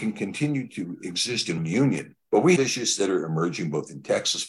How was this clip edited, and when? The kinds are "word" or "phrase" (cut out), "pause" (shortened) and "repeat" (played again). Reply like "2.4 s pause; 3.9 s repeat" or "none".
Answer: 1.6 s word; 2.2 s pause; 2.6 s word